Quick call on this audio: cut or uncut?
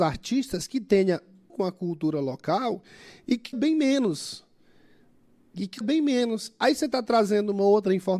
cut